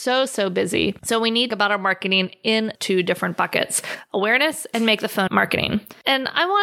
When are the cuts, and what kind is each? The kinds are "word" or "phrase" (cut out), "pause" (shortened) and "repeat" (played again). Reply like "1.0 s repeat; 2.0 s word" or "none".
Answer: 1.5 s phrase; 2.7 s word; 5.3 s word